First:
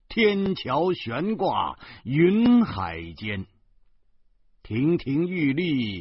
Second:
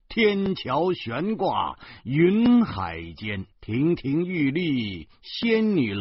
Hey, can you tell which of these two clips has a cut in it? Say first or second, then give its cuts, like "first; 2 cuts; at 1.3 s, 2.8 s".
second; 1 cut; at 3.5 s